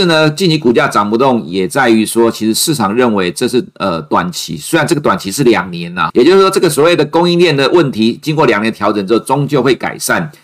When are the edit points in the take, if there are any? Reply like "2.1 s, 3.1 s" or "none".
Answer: 6.1 s